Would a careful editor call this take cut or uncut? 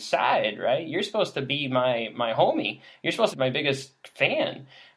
cut